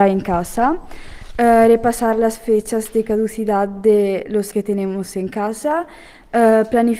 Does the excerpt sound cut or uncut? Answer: cut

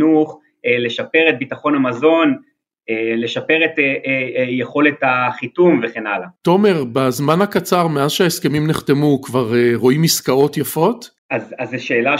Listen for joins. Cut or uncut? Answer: cut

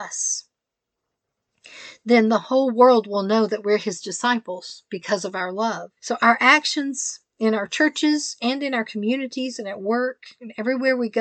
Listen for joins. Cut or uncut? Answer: cut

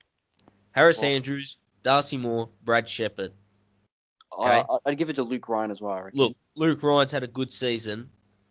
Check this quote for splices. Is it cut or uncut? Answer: uncut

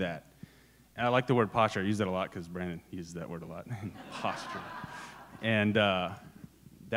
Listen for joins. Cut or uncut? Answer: uncut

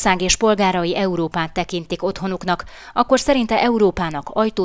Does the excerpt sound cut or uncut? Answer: uncut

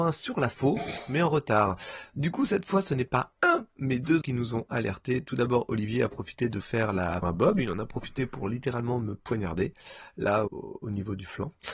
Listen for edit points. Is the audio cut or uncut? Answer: cut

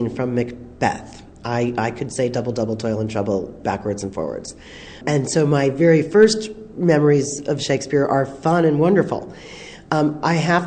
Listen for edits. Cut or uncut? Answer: uncut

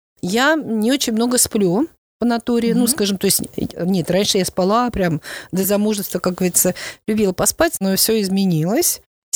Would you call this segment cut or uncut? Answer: uncut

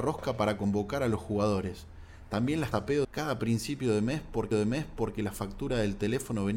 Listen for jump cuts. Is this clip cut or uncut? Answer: cut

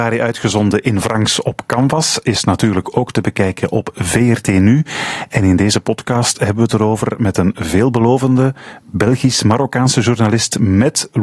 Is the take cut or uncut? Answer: uncut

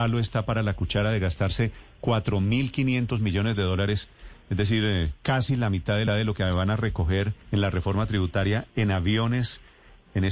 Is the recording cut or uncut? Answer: cut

